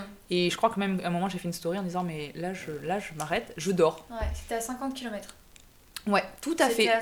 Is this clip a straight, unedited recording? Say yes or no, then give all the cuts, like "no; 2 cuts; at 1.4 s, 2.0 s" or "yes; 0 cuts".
yes; 0 cuts